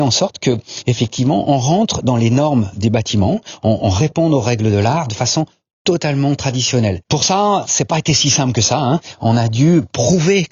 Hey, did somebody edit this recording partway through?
no; 0 cuts

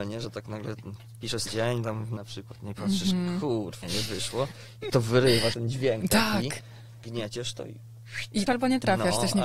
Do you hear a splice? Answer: yes; 6 cuts; at 1.5 s, 2.2 s, 3.8 s, 4.9 s, 5.5 s, 8.5 s

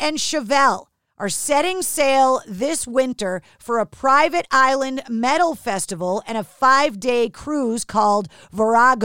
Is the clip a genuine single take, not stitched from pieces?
yes; 0 cuts

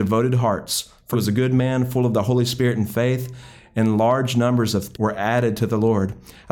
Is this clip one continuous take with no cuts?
no; 2 cuts; at 1.1 s, 4.9 s

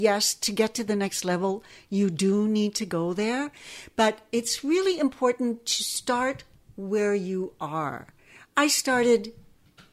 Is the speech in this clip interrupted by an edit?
no; 0 cuts

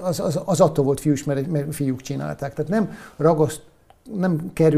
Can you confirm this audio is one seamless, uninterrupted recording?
yes; 0 cuts

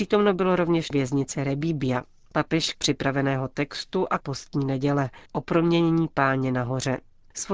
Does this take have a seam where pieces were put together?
yes; 4 cuts; at 0.9 s, 2.7 s, 4.2 s, 5.3 s

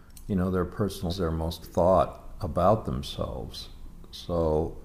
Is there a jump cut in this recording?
yes; 2 cuts; at 1.1 s, 1.6 s

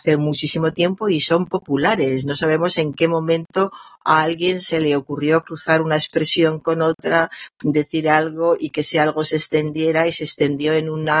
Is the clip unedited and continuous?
yes; 0 cuts

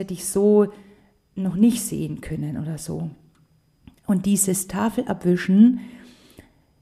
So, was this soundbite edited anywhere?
no; 0 cuts

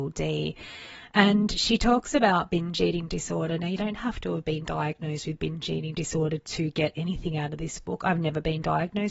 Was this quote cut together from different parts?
no; 0 cuts

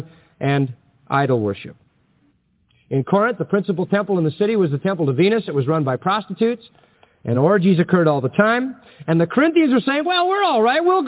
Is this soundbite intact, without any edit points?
yes; 0 cuts

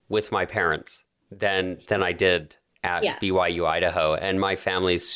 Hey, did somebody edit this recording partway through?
no; 0 cuts

